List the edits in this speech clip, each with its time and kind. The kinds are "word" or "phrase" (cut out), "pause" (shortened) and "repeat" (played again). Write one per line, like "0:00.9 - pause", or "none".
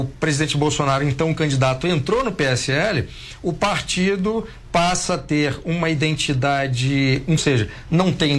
0:07.4 - phrase